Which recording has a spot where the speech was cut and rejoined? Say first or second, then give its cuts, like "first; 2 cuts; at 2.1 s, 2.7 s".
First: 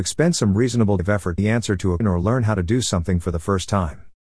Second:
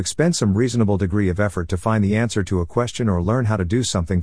first; 3 cuts; at 1.0 s, 1.4 s, 2.0 s